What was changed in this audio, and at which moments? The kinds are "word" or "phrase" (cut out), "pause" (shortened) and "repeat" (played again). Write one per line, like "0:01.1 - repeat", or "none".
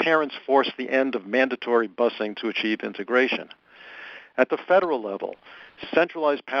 none